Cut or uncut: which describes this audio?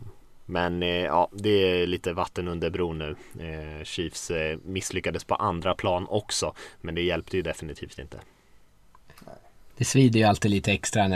uncut